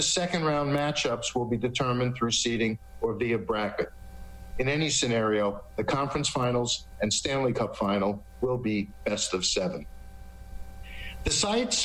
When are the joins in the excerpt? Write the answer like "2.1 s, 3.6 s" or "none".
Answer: none